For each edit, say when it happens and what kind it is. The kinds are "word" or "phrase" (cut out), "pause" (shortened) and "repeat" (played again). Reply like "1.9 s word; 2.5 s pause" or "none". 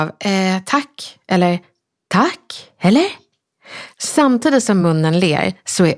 none